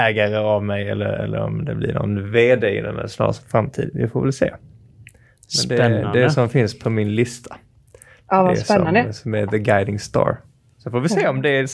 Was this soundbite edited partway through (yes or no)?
no